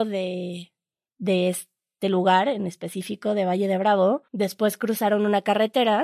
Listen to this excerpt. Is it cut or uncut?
cut